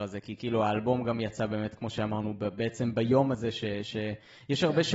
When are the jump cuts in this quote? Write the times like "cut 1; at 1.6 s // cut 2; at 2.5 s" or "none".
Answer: none